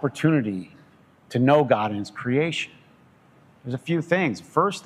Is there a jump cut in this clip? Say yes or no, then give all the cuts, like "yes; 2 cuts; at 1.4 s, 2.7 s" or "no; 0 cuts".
no; 0 cuts